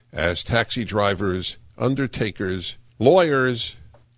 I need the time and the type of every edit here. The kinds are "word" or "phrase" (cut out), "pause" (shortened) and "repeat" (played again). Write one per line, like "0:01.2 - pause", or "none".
0:02.9 - pause